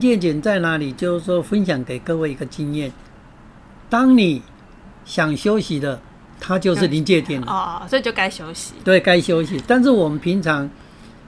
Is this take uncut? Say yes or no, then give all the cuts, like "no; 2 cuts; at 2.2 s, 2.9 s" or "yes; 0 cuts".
no; 1 cut; at 5.0 s